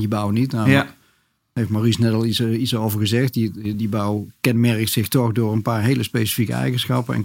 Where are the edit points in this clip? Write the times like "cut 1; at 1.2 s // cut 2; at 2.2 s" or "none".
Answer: none